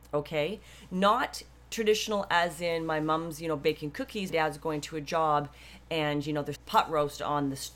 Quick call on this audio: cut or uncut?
cut